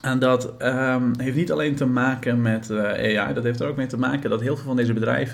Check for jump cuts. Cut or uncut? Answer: uncut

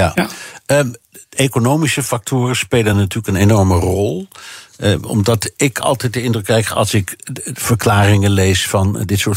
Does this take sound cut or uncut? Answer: uncut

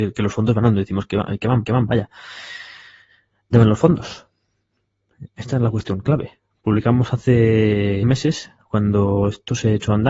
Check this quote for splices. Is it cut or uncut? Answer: cut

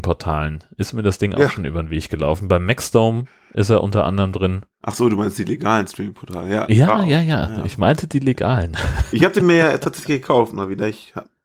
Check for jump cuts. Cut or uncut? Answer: uncut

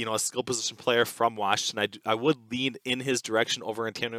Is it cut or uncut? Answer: uncut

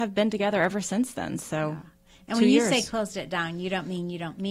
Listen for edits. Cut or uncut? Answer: uncut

